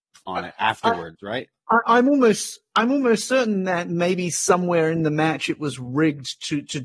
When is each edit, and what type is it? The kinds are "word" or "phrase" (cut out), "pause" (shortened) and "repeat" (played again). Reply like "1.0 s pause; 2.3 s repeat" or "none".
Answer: none